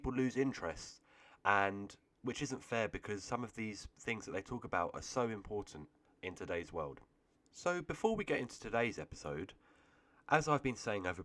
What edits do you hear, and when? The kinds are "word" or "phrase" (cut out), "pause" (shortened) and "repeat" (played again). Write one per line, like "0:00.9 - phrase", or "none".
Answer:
none